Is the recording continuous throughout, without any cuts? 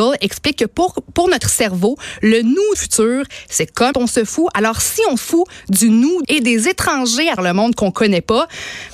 no; 5 cuts; at 2.7 s, 3.9 s, 5.2 s, 6.2 s, 7.4 s

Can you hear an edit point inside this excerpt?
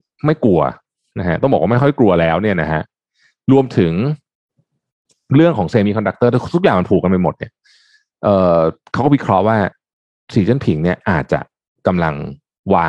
no; 0 cuts

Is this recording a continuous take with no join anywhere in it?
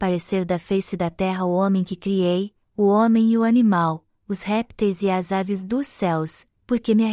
yes; 0 cuts

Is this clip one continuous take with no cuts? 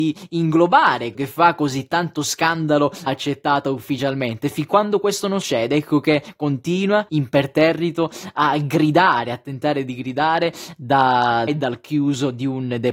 no; 5 cuts; at 1.1 s, 3.1 s, 5.4 s, 7.1 s, 11.5 s

